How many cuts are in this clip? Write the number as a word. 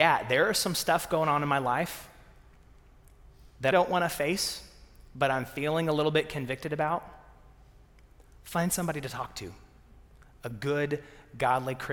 one